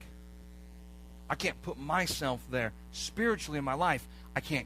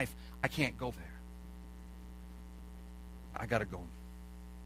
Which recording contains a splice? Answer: second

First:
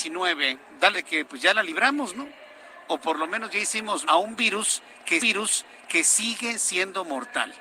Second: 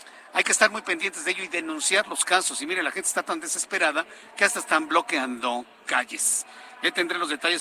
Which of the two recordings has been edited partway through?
first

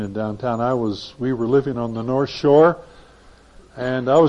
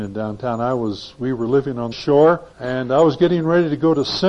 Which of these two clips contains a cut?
second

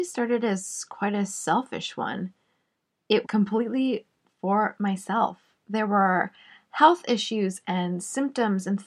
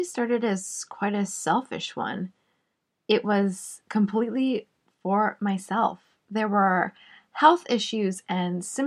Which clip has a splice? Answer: first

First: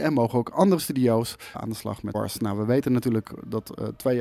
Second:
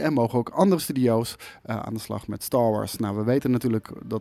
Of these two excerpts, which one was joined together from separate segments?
first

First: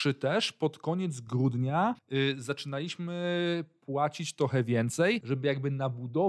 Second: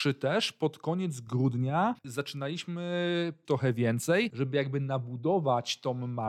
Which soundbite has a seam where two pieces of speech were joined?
second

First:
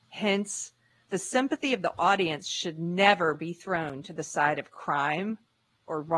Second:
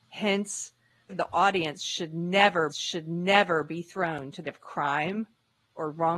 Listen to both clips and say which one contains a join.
second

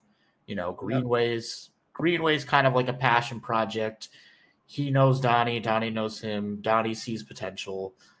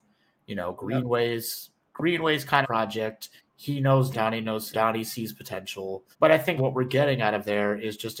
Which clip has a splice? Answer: second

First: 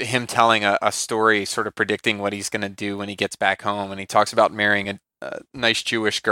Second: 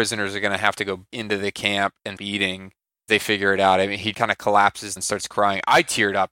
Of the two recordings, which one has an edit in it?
second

